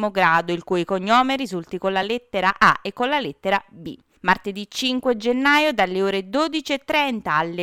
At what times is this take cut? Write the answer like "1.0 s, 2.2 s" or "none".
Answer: none